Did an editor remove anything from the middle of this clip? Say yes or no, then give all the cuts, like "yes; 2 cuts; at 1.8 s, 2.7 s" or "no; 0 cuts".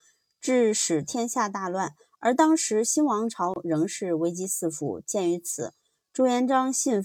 no; 0 cuts